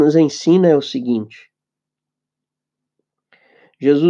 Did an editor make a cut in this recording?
no; 0 cuts

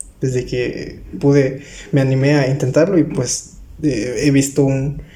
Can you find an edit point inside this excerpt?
no; 0 cuts

